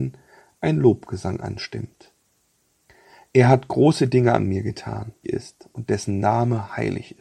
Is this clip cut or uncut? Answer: cut